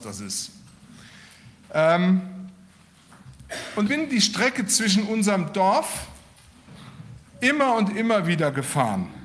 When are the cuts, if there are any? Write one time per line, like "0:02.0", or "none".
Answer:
0:03.9
0:07.3